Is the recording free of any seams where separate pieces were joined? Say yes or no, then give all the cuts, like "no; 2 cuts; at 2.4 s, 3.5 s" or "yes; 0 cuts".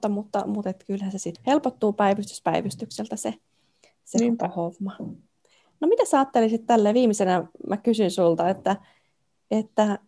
no; 1 cut; at 1.3 s